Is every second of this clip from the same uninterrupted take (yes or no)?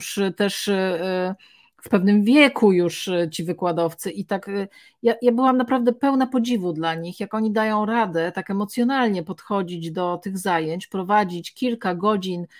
yes